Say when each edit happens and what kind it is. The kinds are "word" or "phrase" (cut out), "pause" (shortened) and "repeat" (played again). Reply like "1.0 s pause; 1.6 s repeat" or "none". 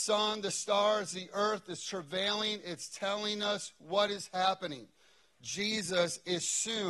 none